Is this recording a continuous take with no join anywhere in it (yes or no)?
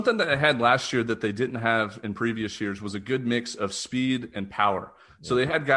yes